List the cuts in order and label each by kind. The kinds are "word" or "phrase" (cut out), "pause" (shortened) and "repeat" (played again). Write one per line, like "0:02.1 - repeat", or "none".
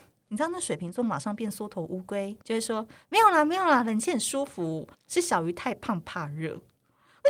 0:02.4 - pause
0:04.9 - pause